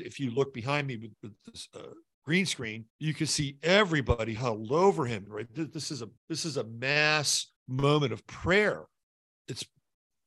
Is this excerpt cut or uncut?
cut